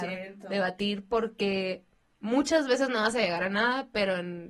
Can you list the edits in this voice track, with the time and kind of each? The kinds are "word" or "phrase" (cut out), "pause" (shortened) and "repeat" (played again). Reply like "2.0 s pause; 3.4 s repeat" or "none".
none